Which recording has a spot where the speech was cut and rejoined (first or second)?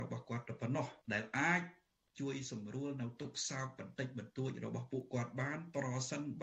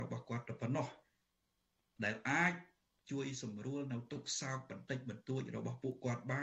first